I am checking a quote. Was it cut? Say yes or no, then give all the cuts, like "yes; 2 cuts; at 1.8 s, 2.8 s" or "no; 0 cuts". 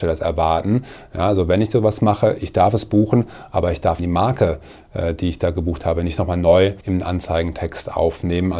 yes; 2 cuts; at 4.0 s, 6.8 s